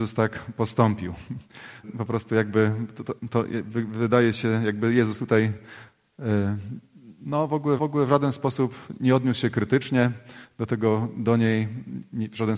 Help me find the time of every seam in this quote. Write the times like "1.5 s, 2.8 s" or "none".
1.8 s, 7.8 s